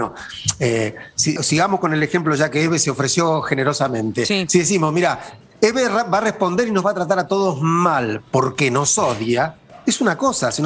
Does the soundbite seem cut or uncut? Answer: cut